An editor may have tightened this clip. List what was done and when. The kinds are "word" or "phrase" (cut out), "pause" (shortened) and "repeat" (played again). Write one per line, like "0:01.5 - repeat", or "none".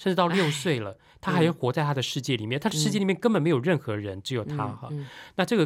none